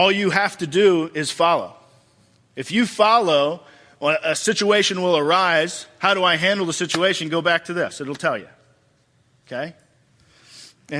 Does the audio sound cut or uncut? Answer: uncut